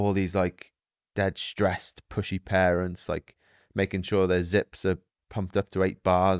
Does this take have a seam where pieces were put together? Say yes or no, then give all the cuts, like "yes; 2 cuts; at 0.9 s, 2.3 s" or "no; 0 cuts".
no; 0 cuts